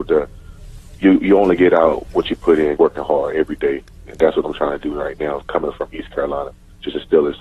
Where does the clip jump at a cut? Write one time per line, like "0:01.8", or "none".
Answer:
0:02.8